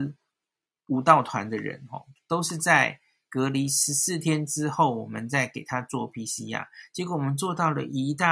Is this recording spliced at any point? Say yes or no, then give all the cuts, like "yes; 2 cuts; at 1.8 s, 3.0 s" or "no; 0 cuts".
no; 0 cuts